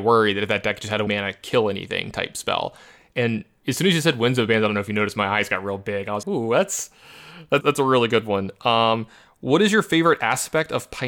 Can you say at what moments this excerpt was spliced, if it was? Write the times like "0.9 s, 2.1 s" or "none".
1.1 s, 6.2 s, 7.6 s